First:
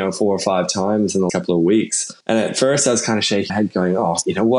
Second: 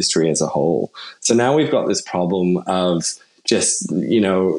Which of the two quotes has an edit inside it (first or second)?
first